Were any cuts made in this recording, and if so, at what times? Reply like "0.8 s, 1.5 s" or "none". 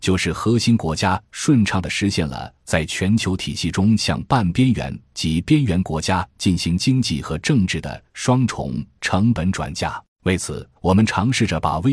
10.1 s, 10.8 s

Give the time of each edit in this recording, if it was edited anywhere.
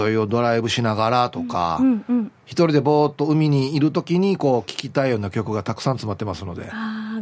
2.4 s

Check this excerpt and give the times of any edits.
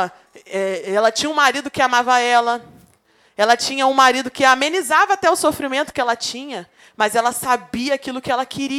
none

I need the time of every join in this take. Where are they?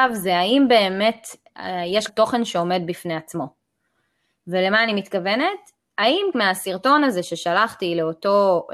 2.1 s, 6.3 s

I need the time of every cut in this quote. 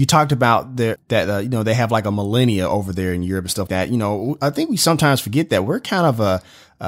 0.9 s, 3.7 s

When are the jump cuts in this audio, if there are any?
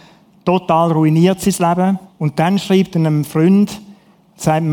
2.1 s

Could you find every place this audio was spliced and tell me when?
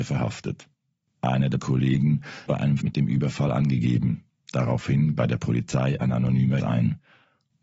1.6 s, 2.5 s, 2.8 s, 5.2 s, 6.6 s

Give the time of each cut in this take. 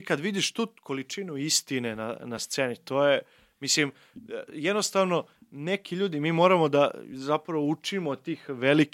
none

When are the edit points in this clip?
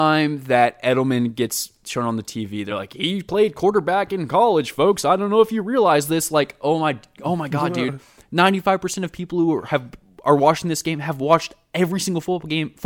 none

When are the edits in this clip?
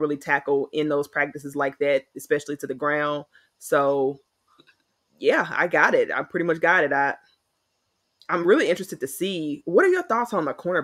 none

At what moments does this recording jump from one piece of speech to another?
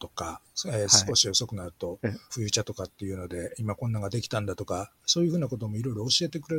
2.3 s

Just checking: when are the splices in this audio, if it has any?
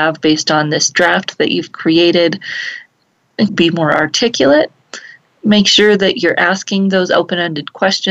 3.5 s

